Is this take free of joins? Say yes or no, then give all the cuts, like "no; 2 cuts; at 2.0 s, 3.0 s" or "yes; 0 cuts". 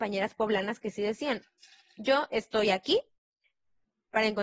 yes; 0 cuts